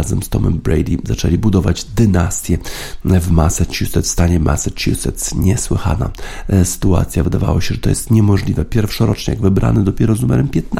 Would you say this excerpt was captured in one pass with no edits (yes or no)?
yes